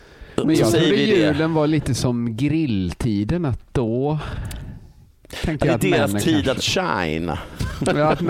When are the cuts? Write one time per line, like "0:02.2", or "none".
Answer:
none